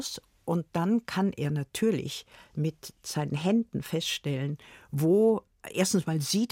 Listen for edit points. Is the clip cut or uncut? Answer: uncut